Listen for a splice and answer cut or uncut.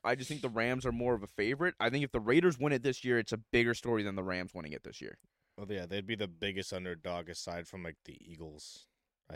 uncut